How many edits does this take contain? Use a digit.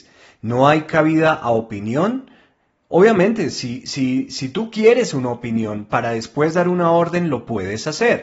0